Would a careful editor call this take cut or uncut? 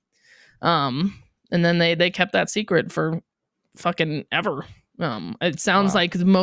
uncut